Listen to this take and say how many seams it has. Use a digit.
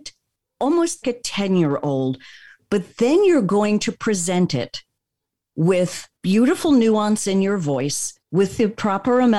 3